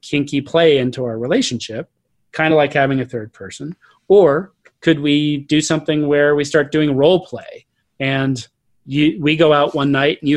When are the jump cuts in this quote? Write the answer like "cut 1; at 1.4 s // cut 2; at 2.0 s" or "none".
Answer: none